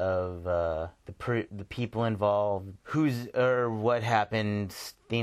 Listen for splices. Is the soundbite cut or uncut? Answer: cut